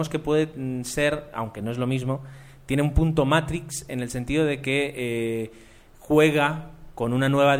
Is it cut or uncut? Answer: uncut